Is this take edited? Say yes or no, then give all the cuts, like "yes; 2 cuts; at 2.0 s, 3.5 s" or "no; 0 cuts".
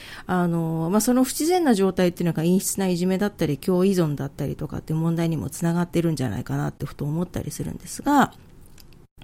no; 0 cuts